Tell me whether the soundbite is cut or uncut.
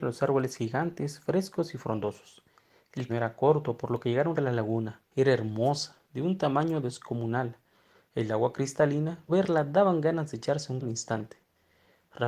cut